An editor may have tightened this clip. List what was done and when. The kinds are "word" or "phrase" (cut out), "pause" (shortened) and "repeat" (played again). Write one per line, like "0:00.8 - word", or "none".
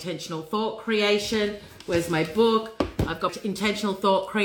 0:03.3 - word